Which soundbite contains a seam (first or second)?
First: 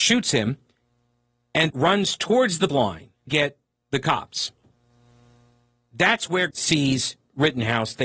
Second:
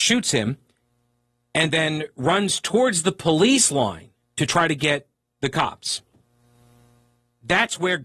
first